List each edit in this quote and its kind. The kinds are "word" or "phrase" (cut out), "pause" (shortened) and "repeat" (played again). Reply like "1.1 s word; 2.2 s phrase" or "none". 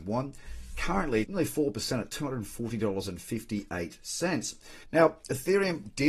1.2 s phrase; 4.8 s pause